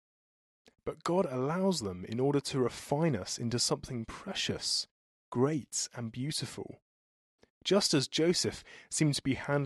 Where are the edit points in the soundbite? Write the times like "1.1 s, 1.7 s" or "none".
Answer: none